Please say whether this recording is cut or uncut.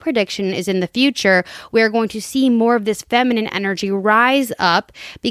uncut